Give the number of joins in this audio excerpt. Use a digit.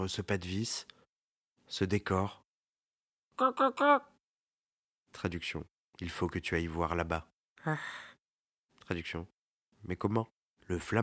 0